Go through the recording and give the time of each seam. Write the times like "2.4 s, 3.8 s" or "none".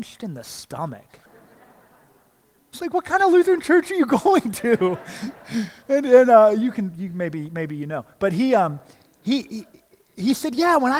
1.3 s